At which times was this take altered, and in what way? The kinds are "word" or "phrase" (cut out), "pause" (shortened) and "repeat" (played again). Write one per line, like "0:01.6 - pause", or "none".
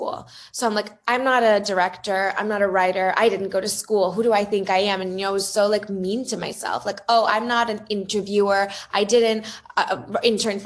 none